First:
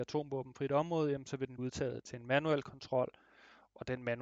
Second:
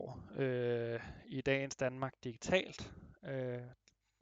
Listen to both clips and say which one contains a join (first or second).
first